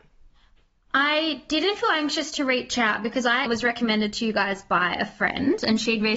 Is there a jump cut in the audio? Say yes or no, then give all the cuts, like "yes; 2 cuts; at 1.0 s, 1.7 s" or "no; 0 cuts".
yes; 1 cut; at 3.5 s